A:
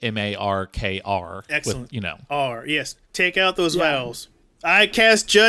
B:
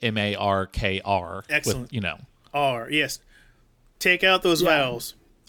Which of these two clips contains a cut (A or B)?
A